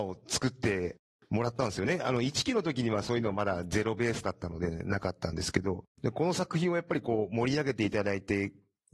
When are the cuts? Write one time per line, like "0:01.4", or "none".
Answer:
0:05.9